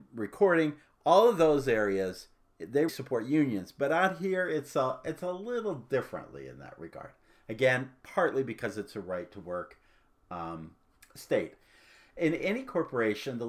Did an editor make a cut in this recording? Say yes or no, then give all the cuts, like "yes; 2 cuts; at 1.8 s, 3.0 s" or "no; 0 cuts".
yes; 1 cut; at 2.9 s